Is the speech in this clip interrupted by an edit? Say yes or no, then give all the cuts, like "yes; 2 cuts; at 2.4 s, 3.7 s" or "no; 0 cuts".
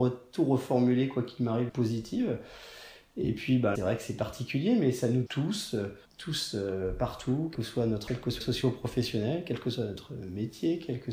yes; 7 cuts; at 1.7 s, 3.7 s, 5.3 s, 6.0 s, 7.5 s, 8.1 s, 8.4 s